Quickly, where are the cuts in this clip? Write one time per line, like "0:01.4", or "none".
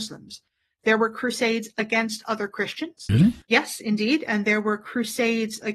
none